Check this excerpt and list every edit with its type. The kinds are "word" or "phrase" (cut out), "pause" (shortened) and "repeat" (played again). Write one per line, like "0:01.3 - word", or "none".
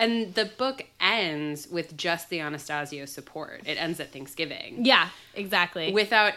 none